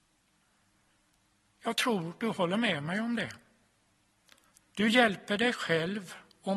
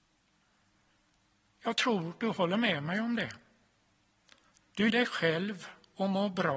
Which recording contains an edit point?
second; 1 cut; at 4.9 s

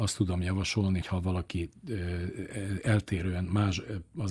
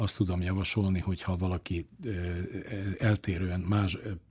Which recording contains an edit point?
first; 1 cut; at 1.0 s

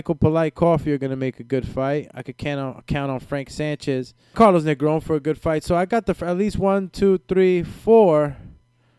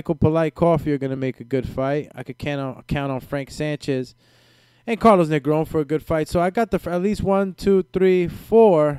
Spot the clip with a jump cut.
first; 1 cut; at 4.3 s

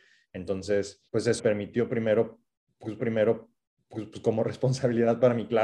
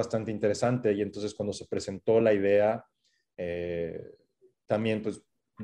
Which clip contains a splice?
first; 3 cuts; at 1.1 s, 1.4 s, 3.0 s

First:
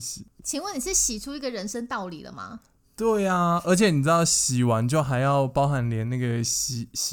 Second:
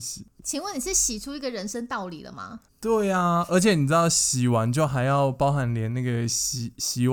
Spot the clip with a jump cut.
second; 1 cut; at 2.7 s

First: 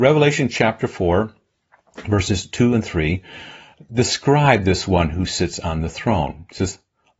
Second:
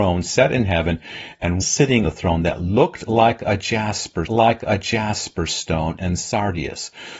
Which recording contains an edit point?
second; 3 cuts; at 1.6 s, 2.0 s, 4.3 s

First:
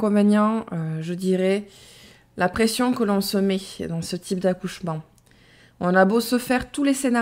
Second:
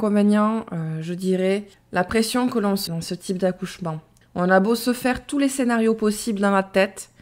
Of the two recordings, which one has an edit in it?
second; 3 cuts; at 1.7 s, 2.9 s, 4.2 s

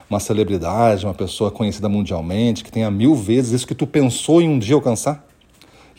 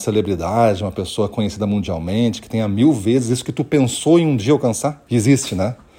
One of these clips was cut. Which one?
second; 1 cut; at 5.1 s

